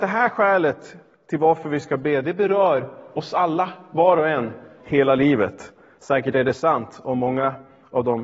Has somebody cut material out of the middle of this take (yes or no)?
yes